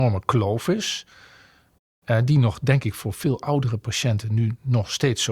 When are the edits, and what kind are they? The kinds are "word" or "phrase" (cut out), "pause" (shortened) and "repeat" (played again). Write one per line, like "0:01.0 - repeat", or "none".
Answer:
none

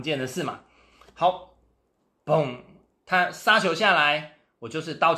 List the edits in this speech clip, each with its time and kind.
none

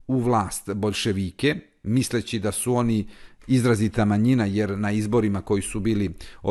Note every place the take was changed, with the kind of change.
none

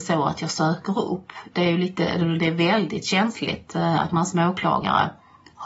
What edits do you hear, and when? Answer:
none

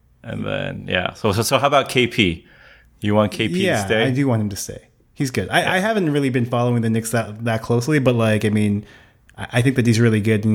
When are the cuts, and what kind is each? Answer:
none

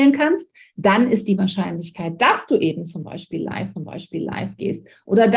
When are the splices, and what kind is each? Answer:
0:03.8 - repeat

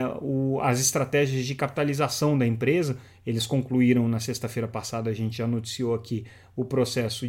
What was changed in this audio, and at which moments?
none

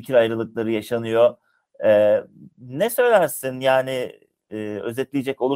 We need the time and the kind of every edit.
none

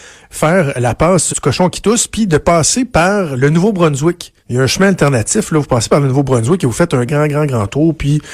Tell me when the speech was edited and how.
0:01.3 - word
0:04.4 - pause
0:07.1 - word

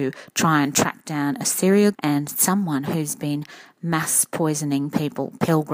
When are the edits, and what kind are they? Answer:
0:01.9 - word

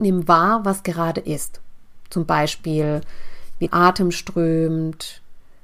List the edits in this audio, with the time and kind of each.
0:03.7 - word

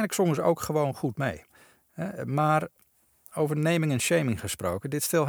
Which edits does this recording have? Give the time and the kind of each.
none

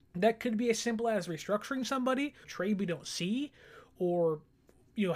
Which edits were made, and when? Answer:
0:02.4 - word

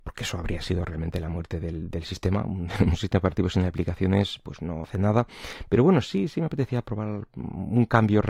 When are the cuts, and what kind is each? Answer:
0:04.8 - word

